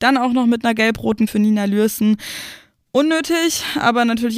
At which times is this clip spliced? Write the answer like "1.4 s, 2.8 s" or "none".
1.3 s